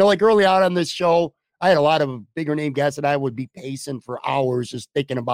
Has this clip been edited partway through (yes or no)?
no